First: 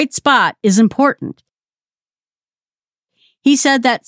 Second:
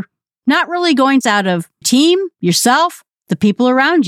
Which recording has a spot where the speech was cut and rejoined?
second; 3 cuts; at 1.2 s, 1.8 s, 2.3 s

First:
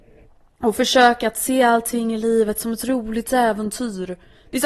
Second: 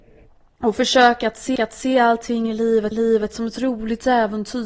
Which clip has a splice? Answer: second; 2 cuts; at 1.6 s, 2.9 s

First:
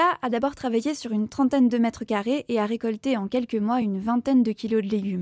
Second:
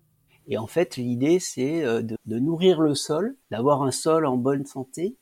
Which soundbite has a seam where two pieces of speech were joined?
second; 2 cuts; at 2.2 s, 3.4 s

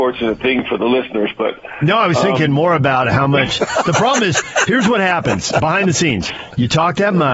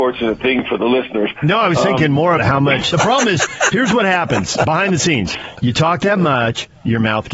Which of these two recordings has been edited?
second; 3 cuts; at 1.4 s, 2.4 s, 2.9 s

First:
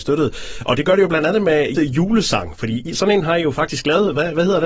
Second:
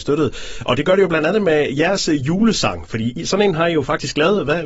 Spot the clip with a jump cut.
first; 1 cut; at 1.7 s

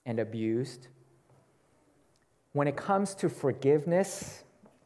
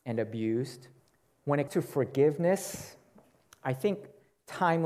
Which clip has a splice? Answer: second; 2 cuts; at 1.0 s, 1.7 s

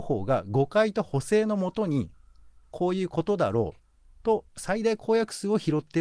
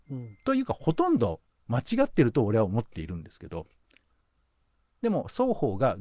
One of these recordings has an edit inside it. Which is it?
first; 1 cut; at 4.5 s

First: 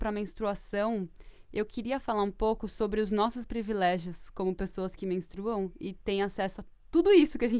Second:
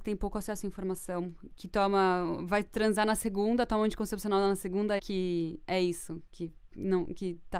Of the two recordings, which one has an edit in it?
second; 1 cut; at 5.0 s

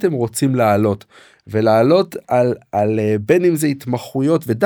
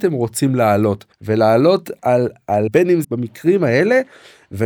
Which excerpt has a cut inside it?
second; 3 cuts; at 1.1 s, 2.7 s, 3.0 s

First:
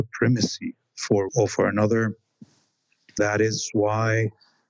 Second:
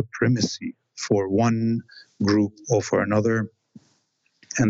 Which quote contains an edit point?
first; 2 cuts; at 1.3 s, 3.2 s

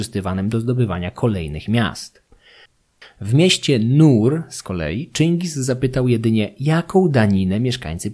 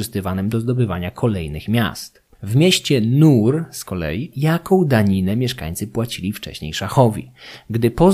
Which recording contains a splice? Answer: second; 2 cuts; at 2.3 s, 4.3 s

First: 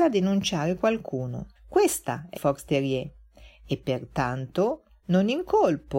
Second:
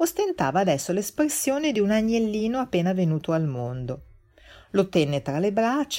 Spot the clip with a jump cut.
first; 2 cuts; at 1.6 s, 2.4 s

